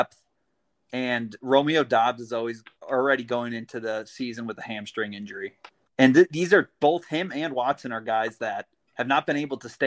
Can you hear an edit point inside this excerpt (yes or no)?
yes